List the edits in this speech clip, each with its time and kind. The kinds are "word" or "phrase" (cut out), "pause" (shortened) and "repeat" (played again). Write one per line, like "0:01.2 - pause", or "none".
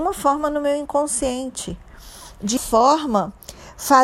0:02.6 - word